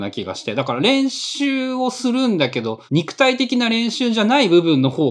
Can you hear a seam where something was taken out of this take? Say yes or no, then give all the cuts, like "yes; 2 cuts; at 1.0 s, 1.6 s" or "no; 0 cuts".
yes; 1 cut; at 2.9 s